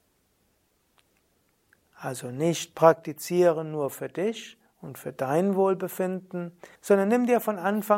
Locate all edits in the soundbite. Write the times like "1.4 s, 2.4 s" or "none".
6.7 s

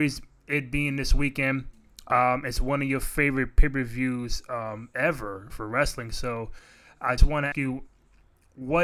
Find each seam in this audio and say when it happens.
5.5 s, 7.2 s, 7.5 s

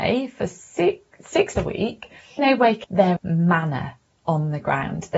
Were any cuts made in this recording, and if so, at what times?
1.6 s, 2.4 s, 2.8 s, 3.2 s

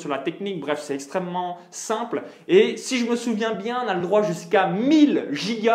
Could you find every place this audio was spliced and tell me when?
none

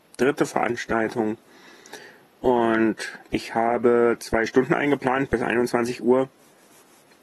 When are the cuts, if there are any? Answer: 3.2 s

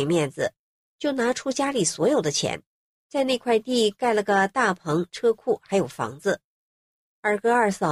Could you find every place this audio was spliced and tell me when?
none

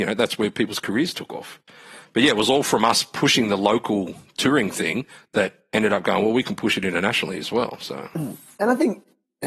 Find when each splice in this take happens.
none

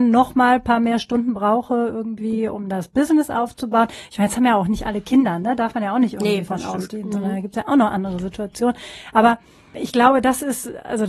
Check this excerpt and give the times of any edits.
none

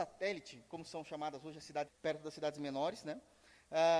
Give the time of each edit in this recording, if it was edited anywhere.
1.9 s

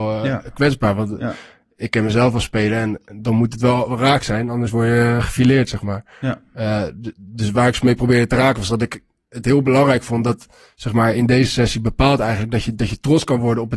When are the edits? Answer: none

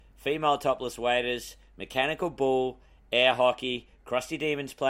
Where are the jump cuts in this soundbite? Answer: none

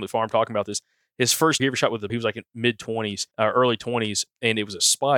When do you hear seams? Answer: 1.6 s, 2.1 s, 3.3 s

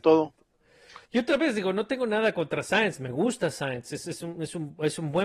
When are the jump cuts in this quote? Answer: 1.1 s

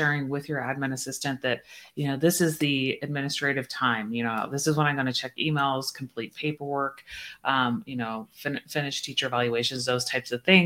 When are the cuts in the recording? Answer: none

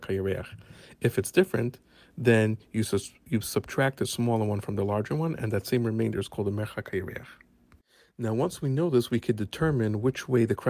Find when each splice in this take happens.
none

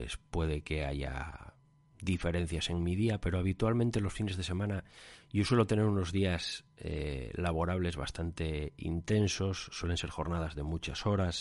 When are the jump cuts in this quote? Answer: none

